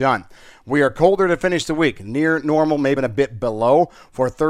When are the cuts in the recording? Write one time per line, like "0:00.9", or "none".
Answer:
0:03.0